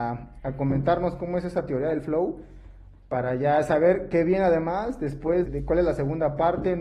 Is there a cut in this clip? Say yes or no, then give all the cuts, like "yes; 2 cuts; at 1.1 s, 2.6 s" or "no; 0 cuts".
yes; 1 cut; at 5.4 s